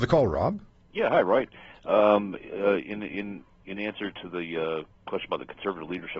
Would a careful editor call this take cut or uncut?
uncut